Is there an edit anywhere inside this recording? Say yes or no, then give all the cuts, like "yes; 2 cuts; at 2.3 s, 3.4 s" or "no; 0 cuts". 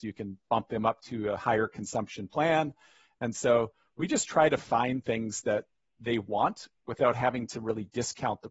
no; 0 cuts